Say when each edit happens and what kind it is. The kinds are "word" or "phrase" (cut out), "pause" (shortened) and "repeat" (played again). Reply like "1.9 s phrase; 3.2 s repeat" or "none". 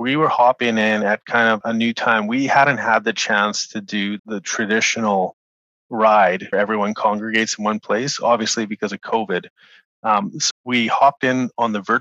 1.6 s word; 4.2 s word; 6.5 s word; 10.5 s word